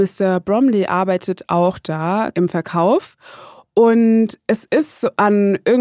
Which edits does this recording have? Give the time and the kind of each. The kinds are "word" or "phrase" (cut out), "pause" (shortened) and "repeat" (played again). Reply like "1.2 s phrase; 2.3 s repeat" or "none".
none